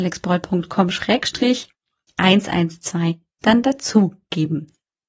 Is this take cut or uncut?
uncut